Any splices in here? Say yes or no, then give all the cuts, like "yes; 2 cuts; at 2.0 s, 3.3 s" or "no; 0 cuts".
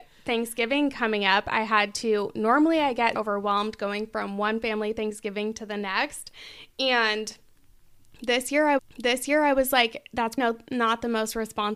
yes; 3 cuts; at 3.2 s, 8.8 s, 10.4 s